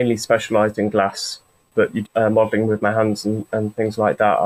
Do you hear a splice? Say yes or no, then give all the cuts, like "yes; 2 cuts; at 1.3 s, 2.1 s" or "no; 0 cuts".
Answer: yes; 1 cut; at 2.1 s